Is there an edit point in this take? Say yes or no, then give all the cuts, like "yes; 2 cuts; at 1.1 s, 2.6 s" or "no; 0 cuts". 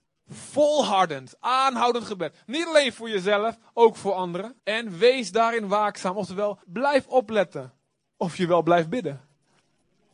yes; 2 cuts; at 4.6 s, 6.6 s